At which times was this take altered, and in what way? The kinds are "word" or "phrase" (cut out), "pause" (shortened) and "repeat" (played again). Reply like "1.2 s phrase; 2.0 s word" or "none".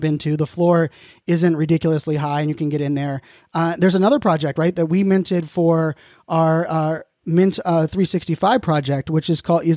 none